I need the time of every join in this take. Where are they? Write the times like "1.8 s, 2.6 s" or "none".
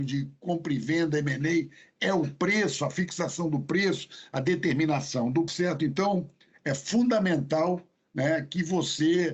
5.5 s